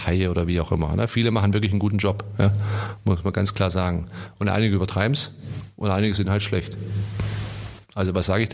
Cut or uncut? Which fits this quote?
uncut